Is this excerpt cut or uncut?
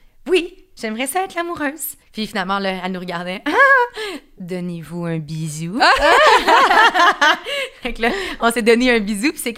cut